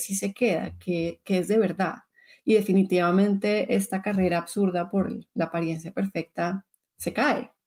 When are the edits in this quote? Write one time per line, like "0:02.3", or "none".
none